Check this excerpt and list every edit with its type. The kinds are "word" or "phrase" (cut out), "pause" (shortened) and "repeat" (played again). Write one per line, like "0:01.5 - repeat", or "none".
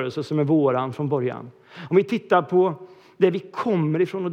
none